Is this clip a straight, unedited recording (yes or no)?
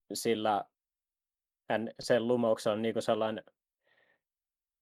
yes